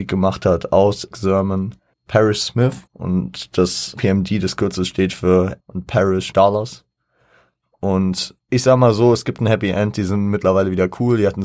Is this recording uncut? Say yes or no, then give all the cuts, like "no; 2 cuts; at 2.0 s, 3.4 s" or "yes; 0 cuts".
no; 7 cuts; at 1.1 s, 1.9 s, 2.9 s, 4.0 s, 5.6 s, 6.3 s, 8.4 s